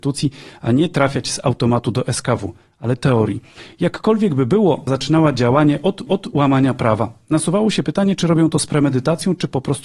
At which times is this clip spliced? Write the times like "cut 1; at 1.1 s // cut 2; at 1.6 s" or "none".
cut 1; at 3.0 s // cut 2; at 4.9 s // cut 3; at 6.1 s